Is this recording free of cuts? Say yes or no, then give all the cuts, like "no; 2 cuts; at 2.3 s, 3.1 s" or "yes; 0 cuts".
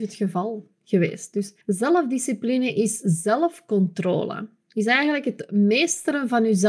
no; 1 cut; at 1.6 s